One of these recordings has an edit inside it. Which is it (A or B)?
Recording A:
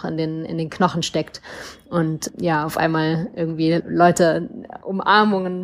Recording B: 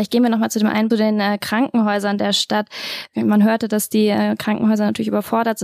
B